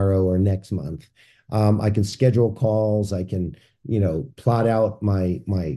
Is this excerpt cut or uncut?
uncut